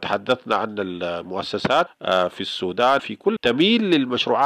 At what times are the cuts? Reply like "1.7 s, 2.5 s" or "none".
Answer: 1.9 s, 3.0 s, 3.4 s